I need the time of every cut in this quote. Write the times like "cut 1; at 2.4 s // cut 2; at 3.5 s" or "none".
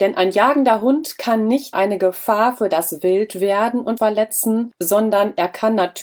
cut 1; at 1.7 s // cut 2; at 4.0 s